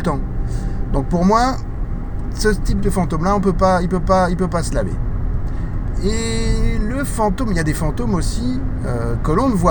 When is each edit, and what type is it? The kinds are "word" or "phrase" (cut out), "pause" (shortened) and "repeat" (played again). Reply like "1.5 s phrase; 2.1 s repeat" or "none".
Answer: 4.0 s repeat